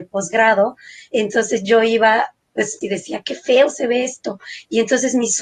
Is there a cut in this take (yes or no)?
yes